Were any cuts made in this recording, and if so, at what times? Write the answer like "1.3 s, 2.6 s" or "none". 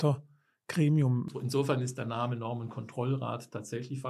none